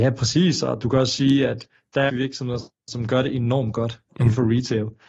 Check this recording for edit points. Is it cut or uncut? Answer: cut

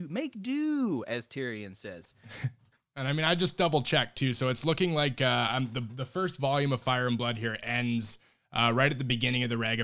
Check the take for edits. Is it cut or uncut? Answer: uncut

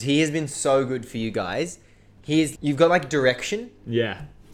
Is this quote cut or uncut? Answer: cut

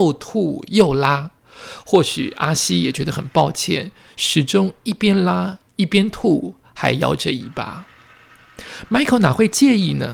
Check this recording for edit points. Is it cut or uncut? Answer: uncut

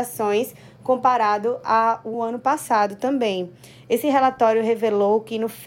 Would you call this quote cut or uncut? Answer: uncut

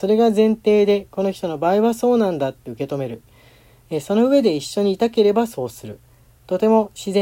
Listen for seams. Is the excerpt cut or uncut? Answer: uncut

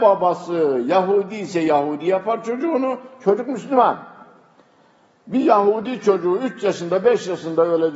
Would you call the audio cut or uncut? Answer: uncut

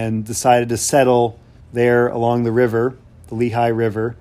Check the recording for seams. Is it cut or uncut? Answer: cut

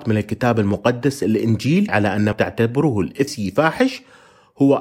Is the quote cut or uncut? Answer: cut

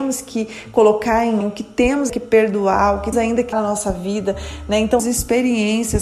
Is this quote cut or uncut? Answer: cut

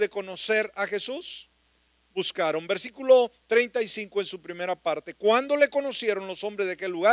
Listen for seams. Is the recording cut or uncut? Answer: uncut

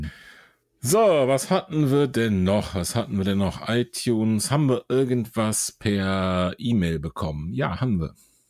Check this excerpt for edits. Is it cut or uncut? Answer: uncut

